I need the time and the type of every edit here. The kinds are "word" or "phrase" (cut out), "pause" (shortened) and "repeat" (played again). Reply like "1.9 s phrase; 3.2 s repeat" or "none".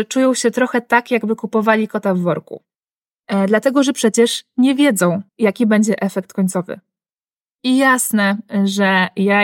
5.3 s pause